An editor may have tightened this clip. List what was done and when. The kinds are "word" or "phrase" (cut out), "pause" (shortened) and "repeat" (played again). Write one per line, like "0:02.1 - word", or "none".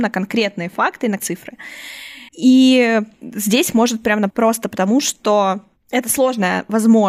0:01.2 - word
0:02.3 - pause
0:04.3 - phrase